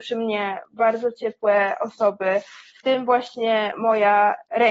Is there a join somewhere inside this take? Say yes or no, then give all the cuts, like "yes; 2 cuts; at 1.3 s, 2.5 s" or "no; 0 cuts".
no; 0 cuts